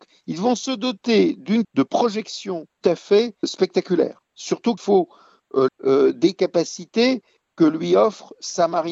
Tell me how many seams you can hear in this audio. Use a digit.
5